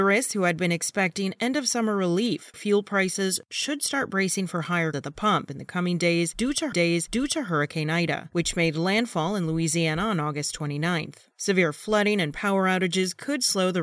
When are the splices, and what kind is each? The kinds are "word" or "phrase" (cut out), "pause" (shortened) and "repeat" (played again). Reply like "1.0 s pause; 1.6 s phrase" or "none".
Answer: 2.5 s word; 4.9 s word; 6.7 s repeat